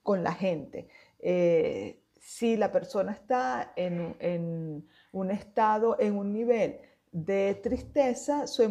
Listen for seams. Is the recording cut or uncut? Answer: uncut